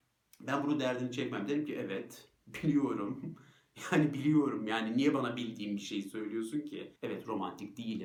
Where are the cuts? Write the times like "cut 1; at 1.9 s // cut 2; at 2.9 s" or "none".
cut 1; at 7.0 s